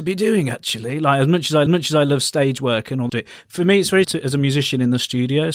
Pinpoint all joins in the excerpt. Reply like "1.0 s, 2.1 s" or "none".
1.7 s, 3.1 s, 4.0 s